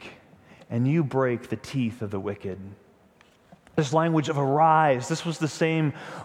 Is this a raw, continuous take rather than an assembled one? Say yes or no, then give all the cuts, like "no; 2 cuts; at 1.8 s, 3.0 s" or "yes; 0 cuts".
yes; 0 cuts